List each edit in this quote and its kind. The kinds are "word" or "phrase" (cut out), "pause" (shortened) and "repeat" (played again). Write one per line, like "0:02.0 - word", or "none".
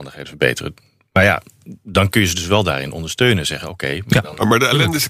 none